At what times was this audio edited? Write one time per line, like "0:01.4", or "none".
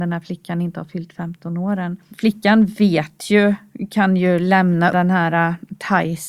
0:04.9